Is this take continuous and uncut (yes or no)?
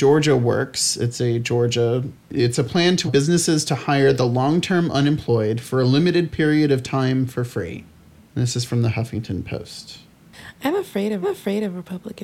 no